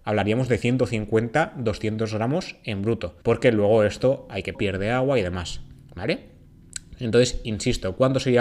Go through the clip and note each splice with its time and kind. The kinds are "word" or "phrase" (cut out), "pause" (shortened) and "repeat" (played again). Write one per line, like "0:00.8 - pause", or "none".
0:03.2 - pause
0:04.5 - word